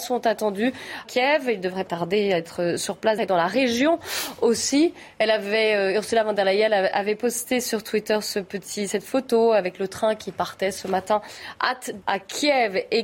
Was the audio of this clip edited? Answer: yes; 4 cuts; at 1.0 s, 1.9 s, 3.2 s, 12.0 s

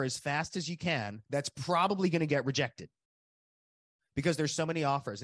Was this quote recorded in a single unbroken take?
no; 1 cut; at 1.2 s

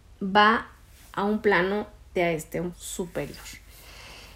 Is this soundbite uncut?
no; 2 cuts; at 2.2 s, 2.7 s

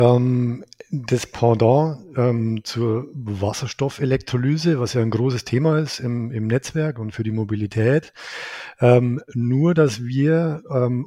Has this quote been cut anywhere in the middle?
no; 0 cuts

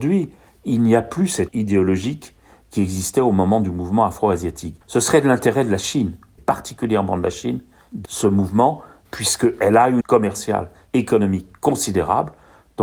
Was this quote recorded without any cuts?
no; 5 cuts; at 1.5 s, 4.8 s, 6.4 s, 8.0 s, 10.0 s

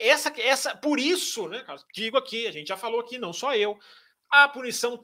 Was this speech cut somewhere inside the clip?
yes; 1 cut; at 1.8 s

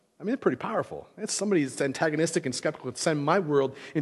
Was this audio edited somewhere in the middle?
no; 0 cuts

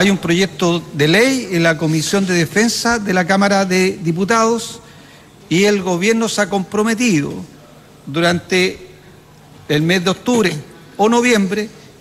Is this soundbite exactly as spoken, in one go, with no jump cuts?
yes; 0 cuts

